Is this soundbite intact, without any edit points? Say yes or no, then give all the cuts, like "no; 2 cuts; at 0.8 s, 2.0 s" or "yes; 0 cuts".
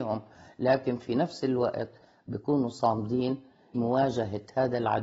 no; 1 cut; at 3.7 s